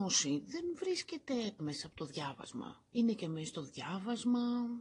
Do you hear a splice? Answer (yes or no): yes